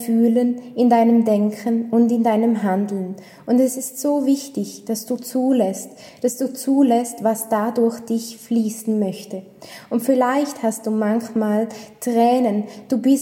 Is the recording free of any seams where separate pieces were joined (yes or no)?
yes